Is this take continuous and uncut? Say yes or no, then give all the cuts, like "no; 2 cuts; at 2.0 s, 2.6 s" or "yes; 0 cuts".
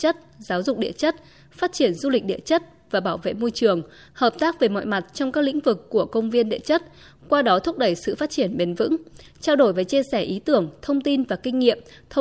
yes; 0 cuts